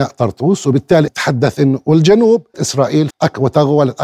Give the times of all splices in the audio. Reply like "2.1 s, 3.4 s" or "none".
1.1 s, 2.5 s, 3.1 s